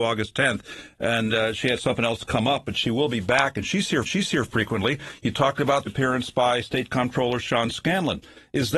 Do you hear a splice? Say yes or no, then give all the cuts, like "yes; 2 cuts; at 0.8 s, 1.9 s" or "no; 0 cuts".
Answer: yes; 2 cuts; at 4.1 s, 5.9 s